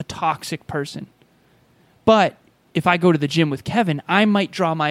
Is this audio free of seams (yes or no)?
yes